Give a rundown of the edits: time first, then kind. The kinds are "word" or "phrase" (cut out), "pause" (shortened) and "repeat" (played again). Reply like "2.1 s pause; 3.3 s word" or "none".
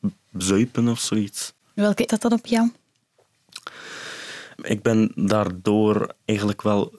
2.1 s word